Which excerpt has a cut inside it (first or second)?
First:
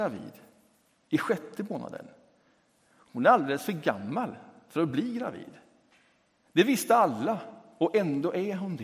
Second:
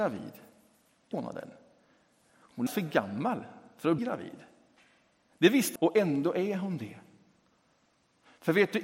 second